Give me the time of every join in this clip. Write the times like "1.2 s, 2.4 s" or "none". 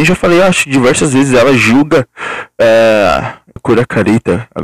3.6 s